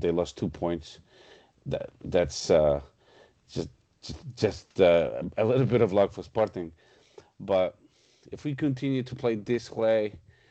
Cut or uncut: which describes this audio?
uncut